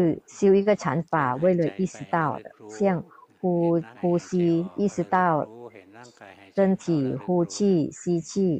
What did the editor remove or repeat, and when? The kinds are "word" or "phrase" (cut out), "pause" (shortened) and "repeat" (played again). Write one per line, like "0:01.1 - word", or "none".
0:03.9 - pause